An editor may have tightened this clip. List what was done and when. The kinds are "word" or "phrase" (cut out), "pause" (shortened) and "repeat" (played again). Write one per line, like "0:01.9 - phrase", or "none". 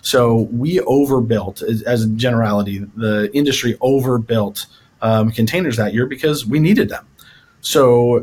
none